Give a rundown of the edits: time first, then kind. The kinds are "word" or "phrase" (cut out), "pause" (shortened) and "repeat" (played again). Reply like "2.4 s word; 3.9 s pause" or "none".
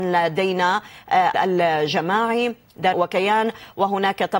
1.3 s word; 2.9 s phrase